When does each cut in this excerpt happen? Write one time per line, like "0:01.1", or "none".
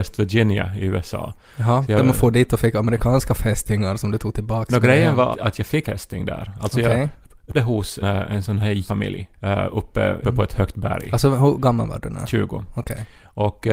0:05.3
0:05.8
0:07.5
0:08.0
0:08.9
0:09.3
0:10.2